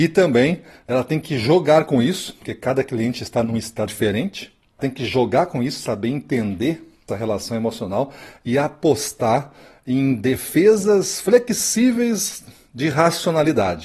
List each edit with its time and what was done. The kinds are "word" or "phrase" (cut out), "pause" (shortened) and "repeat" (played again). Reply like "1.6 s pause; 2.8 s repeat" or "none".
3.9 s word; 4.8 s word; 7.1 s word